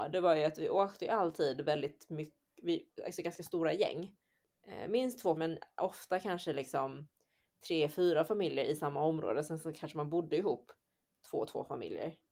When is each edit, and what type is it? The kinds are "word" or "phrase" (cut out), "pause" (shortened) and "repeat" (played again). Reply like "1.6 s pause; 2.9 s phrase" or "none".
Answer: 5.4 s word